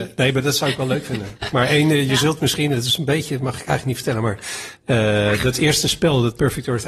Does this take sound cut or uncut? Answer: uncut